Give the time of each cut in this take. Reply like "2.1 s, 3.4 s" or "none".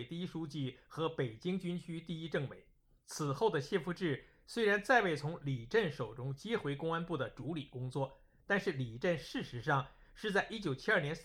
none